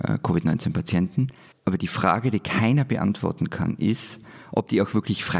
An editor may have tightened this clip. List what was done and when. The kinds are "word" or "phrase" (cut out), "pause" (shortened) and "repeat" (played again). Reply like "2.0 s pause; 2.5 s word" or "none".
1.5 s pause